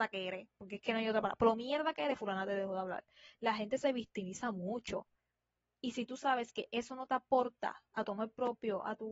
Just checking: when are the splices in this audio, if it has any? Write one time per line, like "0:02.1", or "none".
none